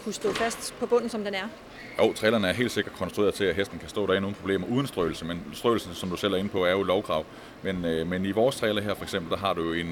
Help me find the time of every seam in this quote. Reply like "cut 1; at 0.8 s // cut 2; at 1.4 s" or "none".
none